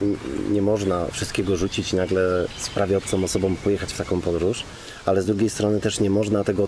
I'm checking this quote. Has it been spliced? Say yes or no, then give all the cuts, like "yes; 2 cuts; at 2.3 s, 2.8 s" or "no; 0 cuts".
no; 0 cuts